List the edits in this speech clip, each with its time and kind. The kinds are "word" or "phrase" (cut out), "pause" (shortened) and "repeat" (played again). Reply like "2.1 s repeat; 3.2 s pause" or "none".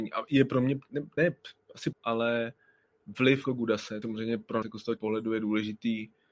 1.2 s word; 1.9 s word; 3.4 s word; 4.0 s word; 4.6 s word; 5.0 s word